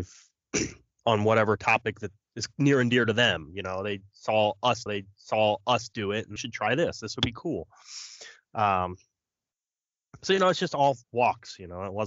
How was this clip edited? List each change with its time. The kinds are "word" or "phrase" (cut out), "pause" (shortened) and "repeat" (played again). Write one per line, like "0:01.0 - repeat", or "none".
0:04.9 - repeat
0:06.4 - phrase
0:11.0 - pause

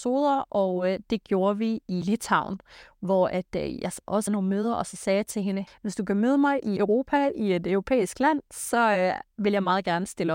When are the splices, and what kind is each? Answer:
0:02.0 - word
0:04.3 - word
0:05.7 - word
0:06.8 - word

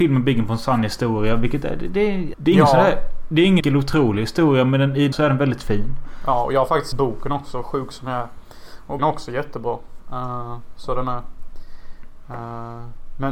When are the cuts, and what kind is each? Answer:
0:02.3 - word
0:03.6 - word
0:05.1 - word
0:06.9 - word
0:09.0 - word

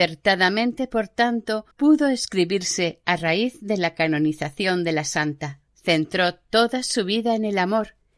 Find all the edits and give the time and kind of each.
0:01.7 - pause
0:05.7 - pause

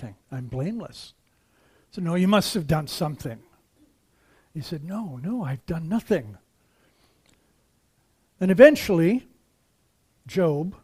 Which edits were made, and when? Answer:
none

